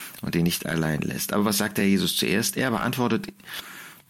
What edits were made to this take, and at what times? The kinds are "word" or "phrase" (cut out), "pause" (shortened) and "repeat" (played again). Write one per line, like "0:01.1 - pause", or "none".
none

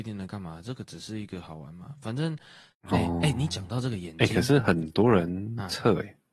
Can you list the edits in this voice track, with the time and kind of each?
none

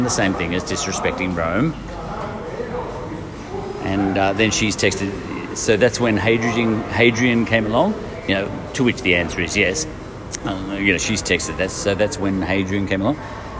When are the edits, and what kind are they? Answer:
none

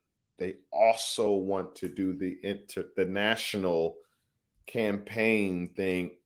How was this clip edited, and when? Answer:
none

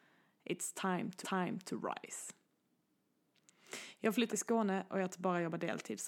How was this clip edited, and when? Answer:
0:01.2 - repeat
0:04.3 - word
0:05.1 - phrase

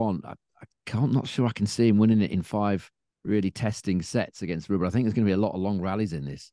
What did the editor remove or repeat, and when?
0:03.1 - pause

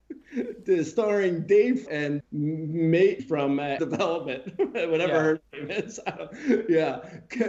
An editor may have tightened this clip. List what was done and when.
0:01.9 - word
0:02.2 - word
0:03.2 - word
0:03.8 - word

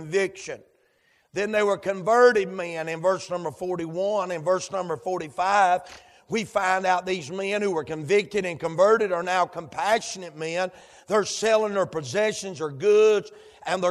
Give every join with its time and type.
none

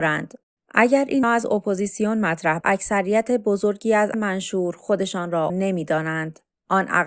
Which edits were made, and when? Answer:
0:01.2 - word
0:02.6 - word
0:04.1 - word
0:05.5 - word

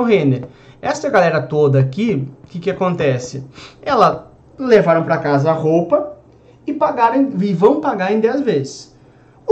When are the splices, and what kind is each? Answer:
none

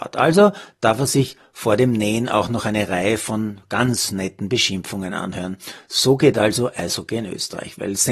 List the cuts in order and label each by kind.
none

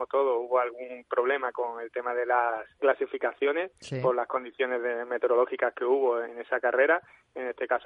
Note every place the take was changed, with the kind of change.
0:02.8 - word
0:06.2 - word

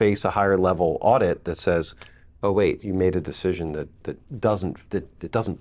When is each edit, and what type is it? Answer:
none

